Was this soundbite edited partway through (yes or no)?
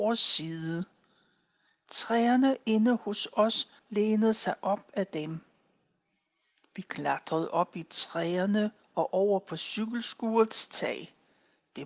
no